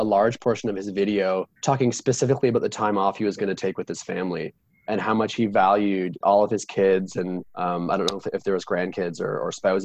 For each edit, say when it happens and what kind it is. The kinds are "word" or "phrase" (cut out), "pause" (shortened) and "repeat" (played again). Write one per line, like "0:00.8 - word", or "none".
0:01.6 - pause
0:06.2 - phrase
0:07.5 - pause